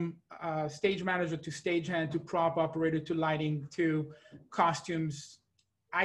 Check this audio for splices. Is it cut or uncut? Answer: uncut